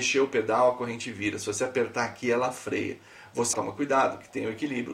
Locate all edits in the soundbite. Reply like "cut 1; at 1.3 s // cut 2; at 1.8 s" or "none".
cut 1; at 3.5 s